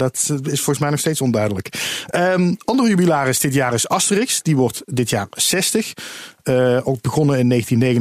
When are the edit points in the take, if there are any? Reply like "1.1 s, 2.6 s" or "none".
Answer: none